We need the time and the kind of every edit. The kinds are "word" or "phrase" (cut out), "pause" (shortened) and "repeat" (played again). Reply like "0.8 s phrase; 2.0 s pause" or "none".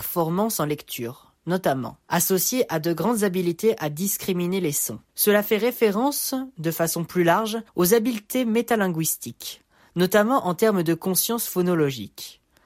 5.1 s pause; 7.7 s pause